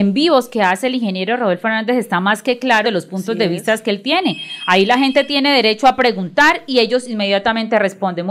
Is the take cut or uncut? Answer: cut